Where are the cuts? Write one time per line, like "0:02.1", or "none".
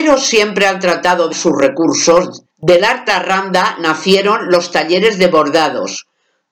0:01.3
0:02.5
0:03.1